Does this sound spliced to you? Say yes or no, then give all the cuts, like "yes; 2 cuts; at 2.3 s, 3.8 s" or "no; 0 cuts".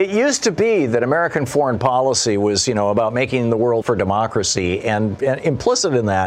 yes; 1 cut; at 3.8 s